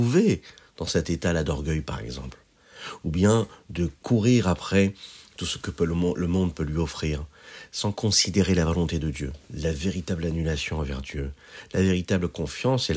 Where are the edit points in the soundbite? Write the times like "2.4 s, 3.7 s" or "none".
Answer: 9.4 s